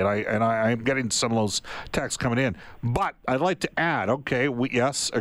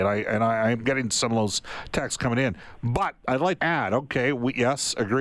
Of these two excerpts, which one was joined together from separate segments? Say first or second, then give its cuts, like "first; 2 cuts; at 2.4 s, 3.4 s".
second; 1 cut; at 3.6 s